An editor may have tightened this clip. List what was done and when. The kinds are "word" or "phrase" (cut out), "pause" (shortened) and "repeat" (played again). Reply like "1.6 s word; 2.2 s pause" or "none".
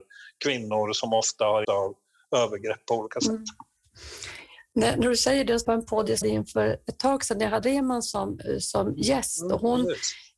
1.6 s word; 5.6 s phrase; 6.2 s word; 7.6 s word

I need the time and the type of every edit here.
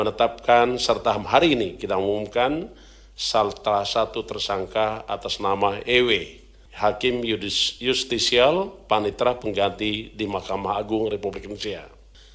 none

